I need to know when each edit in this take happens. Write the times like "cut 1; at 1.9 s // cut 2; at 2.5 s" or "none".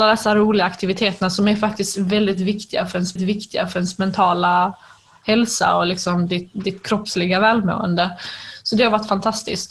cut 1; at 3.2 s